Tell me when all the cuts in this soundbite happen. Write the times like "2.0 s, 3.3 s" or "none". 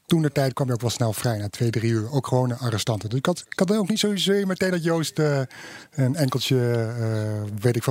none